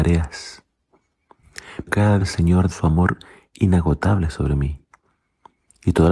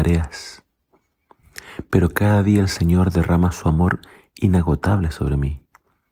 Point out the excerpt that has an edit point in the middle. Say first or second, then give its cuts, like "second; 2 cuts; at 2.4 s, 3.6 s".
first; 3 cuts; at 1.9 s, 2.2 s, 2.7 s